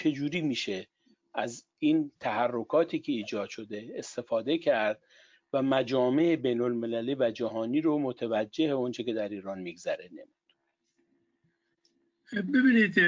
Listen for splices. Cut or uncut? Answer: uncut